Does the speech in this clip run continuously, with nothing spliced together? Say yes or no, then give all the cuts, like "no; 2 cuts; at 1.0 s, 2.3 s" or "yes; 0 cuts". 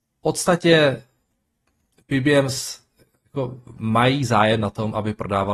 yes; 0 cuts